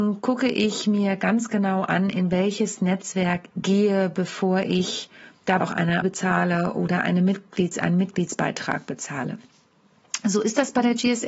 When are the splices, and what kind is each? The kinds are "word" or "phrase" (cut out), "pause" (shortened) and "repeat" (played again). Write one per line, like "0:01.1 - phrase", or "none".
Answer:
0:03.5 - word
0:05.6 - word
0:06.0 - word